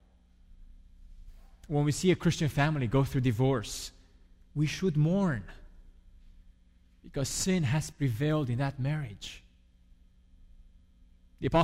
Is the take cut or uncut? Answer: uncut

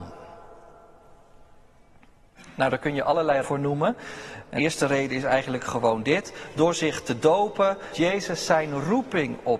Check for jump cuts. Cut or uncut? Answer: cut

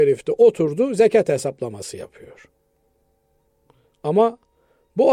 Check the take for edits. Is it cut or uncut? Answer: uncut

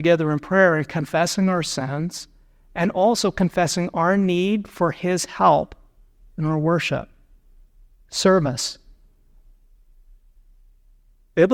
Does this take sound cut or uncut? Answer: uncut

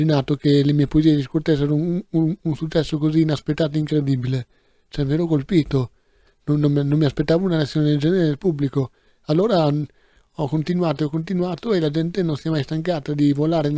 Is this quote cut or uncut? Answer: uncut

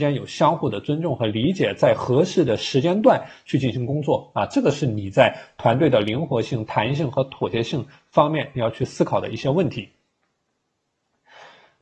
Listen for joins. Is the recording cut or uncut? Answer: uncut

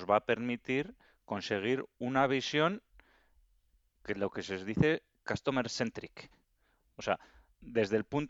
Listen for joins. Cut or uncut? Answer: uncut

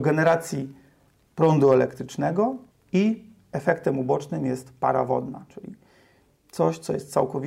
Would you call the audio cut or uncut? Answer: cut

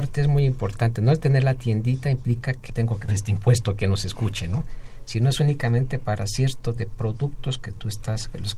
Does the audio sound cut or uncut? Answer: cut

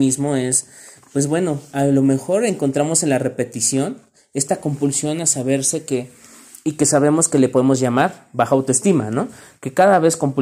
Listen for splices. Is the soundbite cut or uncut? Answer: uncut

